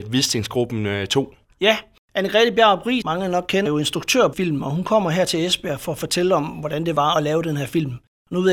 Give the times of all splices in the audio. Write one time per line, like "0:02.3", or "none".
0:03.0
0:03.7
0:04.3

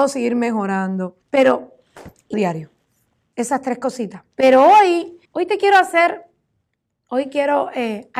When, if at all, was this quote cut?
0:01.2
0:02.3
0:04.3
0:05.2

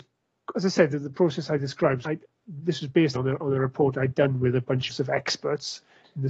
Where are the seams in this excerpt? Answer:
0:02.1
0:03.2
0:04.9

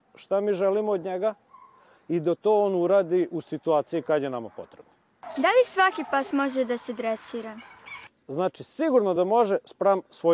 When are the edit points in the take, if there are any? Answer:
none

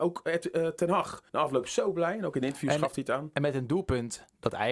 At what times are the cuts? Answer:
0:01.3

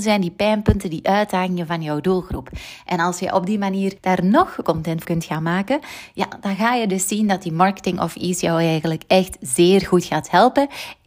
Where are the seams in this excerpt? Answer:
0:04.0
0:04.6
0:05.0

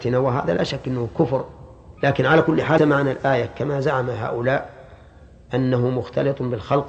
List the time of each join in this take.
0:02.0
0:02.8

